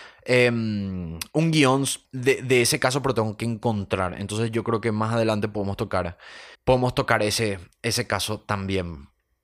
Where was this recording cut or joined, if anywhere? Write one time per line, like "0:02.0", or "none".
0:02.0
0:06.5

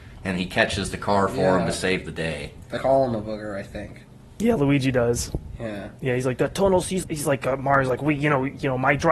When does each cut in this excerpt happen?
0:02.8
0:07.0

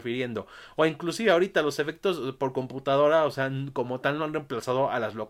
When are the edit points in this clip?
none

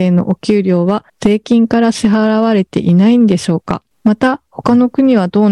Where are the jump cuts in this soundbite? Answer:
0:01.1
0:03.9

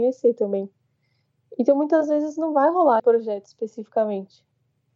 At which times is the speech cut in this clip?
0:03.0

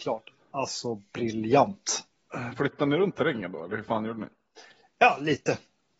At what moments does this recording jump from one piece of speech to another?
none

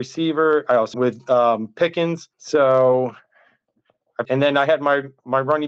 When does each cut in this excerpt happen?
0:00.9
0:02.3
0:04.2

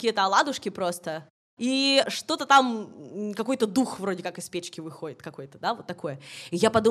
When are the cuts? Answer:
none

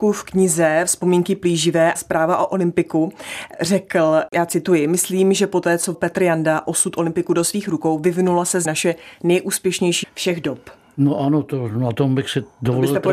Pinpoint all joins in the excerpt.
0:02.0
0:05.9
0:08.7
0:10.0

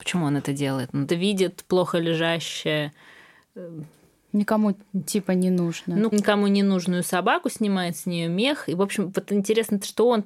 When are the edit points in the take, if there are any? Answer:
0:01.1
0:06.1

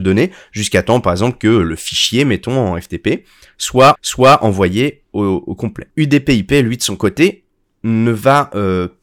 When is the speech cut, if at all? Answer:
0:03.9
0:05.9

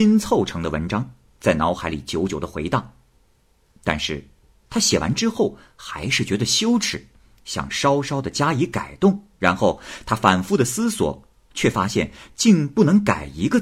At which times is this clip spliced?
0:09.3

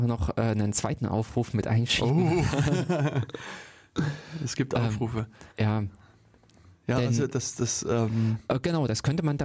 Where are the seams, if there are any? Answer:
0:05.5

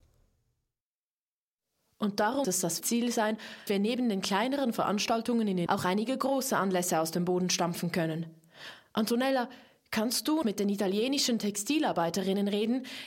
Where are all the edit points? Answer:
0:02.4
0:02.8
0:03.7
0:05.7
0:10.4

